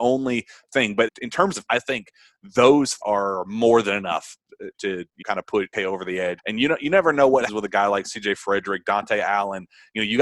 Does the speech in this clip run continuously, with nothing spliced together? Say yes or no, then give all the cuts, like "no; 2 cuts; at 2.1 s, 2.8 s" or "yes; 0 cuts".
no; 8 cuts; at 1.1 s, 1.7 s, 3.0 s, 4.7 s, 5.2 s, 5.7 s, 6.4 s, 7.5 s